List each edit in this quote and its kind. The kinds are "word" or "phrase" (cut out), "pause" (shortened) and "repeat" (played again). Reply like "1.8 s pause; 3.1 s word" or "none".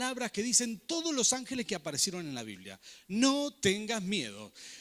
none